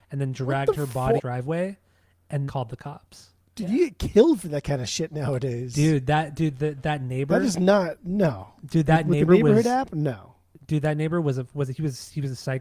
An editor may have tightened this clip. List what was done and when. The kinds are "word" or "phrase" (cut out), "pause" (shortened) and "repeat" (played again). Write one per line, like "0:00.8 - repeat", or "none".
0:01.2 - phrase
0:02.5 - word
0:03.4 - pause